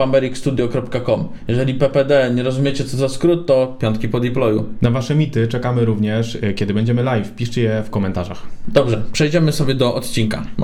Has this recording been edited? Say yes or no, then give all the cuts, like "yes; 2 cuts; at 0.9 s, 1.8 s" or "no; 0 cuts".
no; 0 cuts